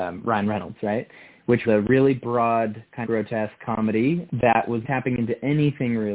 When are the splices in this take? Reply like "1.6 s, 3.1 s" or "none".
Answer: 1.6 s, 3.0 s, 4.3 s, 4.8 s